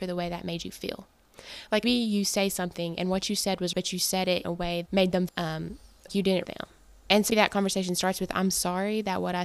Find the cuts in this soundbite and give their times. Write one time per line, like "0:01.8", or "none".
0:01.8
0:03.7
0:04.4
0:04.9
0:05.3
0:06.1
0:06.4
0:07.3